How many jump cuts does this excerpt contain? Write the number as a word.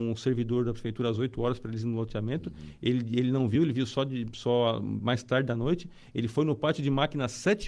zero